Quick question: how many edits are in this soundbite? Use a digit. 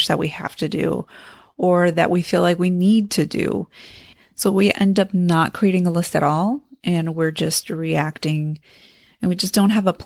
0